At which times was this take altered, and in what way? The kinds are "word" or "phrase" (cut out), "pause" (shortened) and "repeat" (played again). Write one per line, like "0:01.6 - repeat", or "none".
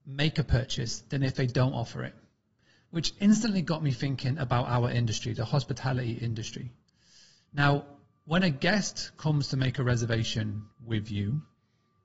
none